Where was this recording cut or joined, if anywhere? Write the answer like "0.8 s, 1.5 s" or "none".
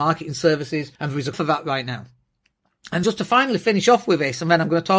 1.0 s, 1.3 s, 3.0 s